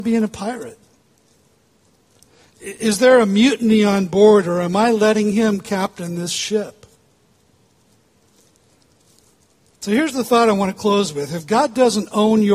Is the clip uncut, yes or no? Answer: yes